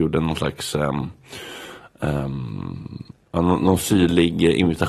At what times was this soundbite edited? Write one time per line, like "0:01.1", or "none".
none